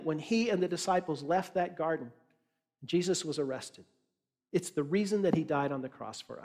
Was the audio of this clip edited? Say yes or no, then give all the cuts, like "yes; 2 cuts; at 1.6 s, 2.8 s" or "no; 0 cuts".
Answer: no; 0 cuts